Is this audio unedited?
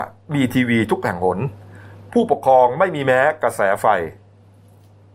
yes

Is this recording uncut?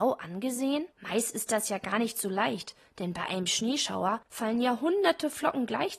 no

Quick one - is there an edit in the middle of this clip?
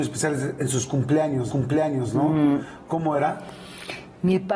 yes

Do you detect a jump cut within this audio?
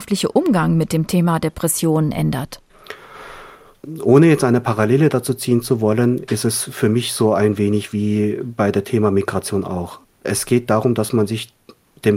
no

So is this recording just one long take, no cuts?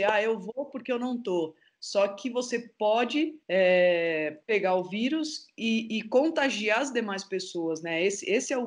no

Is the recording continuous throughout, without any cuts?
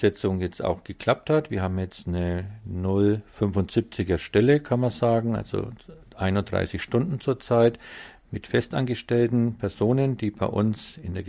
yes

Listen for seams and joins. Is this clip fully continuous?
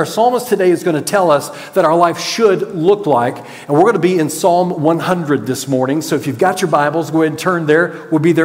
yes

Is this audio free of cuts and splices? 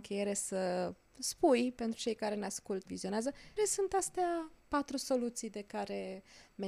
no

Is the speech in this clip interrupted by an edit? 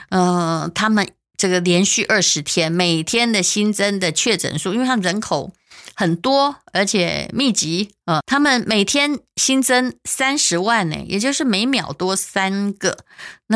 yes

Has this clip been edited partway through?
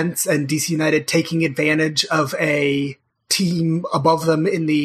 yes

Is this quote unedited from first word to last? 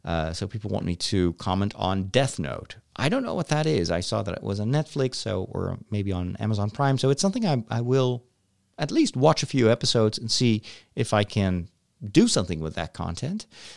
yes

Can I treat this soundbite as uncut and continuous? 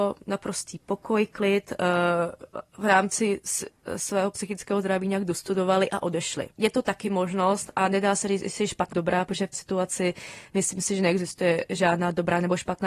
no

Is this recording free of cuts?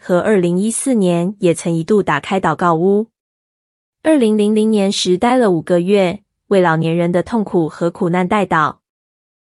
yes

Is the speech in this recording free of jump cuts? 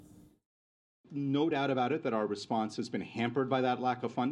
yes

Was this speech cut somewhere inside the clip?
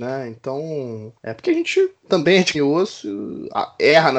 yes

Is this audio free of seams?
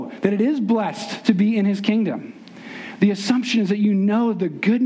yes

